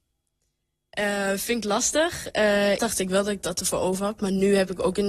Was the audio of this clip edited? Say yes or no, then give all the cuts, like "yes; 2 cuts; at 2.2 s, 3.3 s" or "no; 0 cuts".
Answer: yes; 1 cut; at 2.8 s